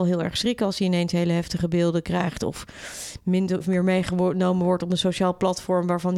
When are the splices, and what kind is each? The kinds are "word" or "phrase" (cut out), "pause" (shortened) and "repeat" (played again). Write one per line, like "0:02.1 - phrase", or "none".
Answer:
0:03.6 - word